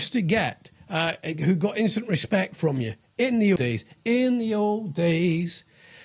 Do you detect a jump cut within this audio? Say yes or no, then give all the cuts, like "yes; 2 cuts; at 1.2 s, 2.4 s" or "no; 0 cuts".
yes; 1 cut; at 3.6 s